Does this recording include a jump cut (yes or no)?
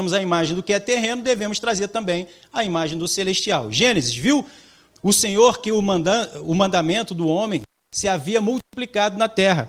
no